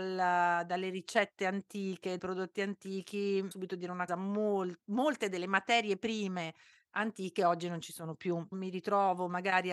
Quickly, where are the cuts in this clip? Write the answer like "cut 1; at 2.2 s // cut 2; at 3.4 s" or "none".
cut 1; at 2.2 s // cut 2; at 3.5 s // cut 3; at 4.1 s // cut 4; at 8.5 s